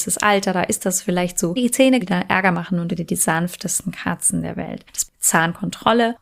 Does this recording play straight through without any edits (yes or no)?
no